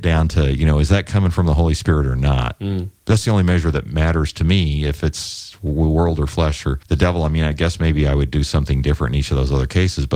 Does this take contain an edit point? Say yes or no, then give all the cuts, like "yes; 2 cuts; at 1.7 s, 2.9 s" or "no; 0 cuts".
no; 0 cuts